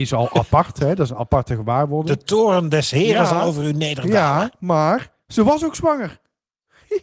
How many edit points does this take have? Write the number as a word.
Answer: one